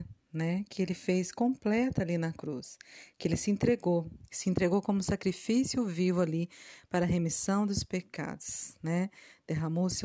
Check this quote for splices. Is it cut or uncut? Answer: uncut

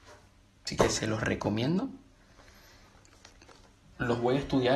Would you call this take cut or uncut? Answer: uncut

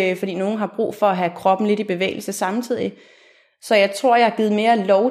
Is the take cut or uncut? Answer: uncut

